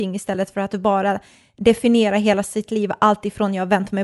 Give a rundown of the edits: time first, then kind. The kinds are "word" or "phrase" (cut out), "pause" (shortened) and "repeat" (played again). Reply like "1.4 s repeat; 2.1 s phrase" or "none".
none